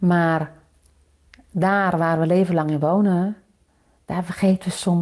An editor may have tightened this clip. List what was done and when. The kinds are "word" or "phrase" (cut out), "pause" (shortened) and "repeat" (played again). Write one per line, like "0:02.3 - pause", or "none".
none